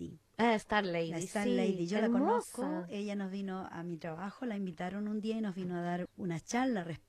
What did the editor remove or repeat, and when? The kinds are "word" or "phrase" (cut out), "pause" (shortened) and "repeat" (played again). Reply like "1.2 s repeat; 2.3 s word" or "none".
none